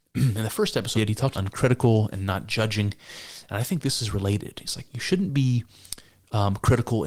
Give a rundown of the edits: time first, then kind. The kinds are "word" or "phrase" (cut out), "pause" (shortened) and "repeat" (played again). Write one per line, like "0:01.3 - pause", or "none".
0:00.9 - word
0:01.3 - phrase